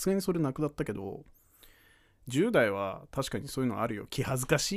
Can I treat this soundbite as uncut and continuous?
yes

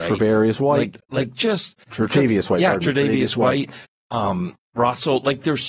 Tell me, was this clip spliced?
no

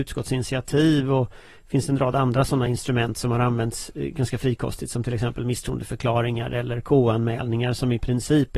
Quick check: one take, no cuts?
yes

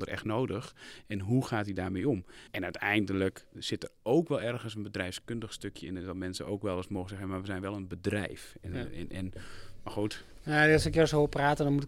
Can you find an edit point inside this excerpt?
yes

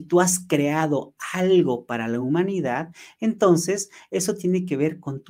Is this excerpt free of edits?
yes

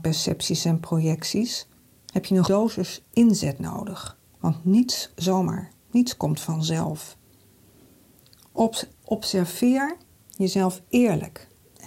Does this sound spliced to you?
yes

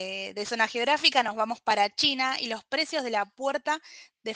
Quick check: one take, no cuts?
yes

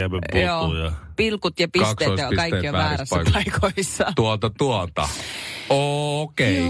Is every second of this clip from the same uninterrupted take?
yes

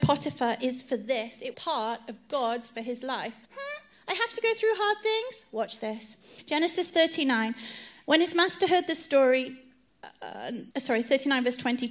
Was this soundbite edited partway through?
yes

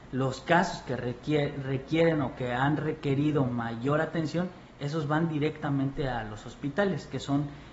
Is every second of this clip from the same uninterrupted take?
yes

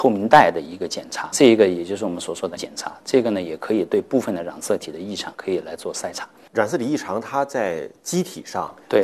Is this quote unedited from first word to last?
no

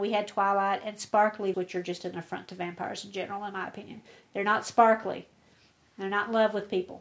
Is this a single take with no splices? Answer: no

